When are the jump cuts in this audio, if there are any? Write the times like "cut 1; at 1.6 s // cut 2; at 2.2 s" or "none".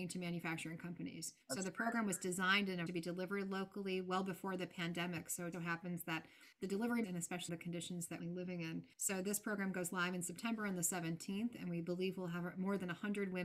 cut 1; at 1.4 s // cut 2; at 2.9 s // cut 3; at 5.5 s // cut 4; at 6.5 s // cut 5; at 7.0 s // cut 6; at 7.5 s // cut 7; at 8.2 s // cut 8; at 8.9 s